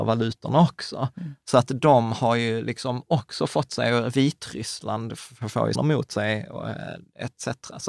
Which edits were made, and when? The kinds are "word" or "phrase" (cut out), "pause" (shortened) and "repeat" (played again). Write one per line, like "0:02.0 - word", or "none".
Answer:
0:05.7 - word